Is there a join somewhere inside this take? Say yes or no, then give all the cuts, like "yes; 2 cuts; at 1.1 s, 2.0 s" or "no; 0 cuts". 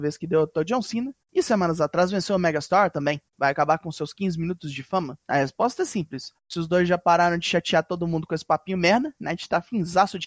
yes; 4 cuts; at 1.2 s, 3.3 s, 5.2 s, 6.4 s